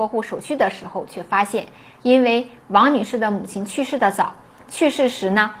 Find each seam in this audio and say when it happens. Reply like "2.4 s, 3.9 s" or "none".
none